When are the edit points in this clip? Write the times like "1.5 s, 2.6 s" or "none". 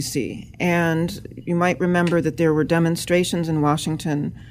none